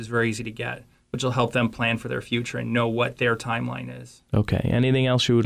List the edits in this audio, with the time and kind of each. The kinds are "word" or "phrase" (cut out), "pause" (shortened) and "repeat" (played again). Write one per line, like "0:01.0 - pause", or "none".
none